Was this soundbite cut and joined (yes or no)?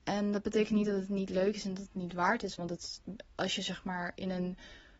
no